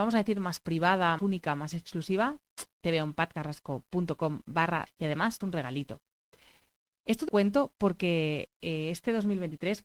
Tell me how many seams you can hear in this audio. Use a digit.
4